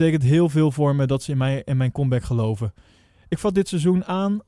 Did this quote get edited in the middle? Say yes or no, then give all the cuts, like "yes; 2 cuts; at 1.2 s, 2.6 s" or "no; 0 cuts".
no; 0 cuts